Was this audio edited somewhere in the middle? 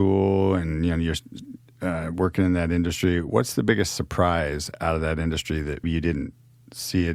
yes; 1 cut; at 5.8 s

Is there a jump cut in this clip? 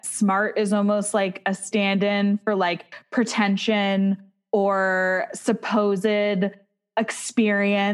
no; 0 cuts

